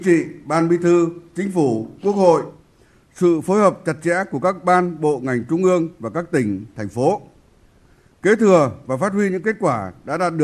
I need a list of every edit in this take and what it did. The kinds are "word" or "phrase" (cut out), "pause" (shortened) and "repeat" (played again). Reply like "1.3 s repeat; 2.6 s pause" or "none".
none